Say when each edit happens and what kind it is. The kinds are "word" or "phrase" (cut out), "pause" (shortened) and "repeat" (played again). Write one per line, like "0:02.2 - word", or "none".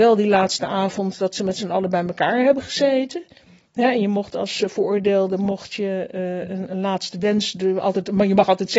none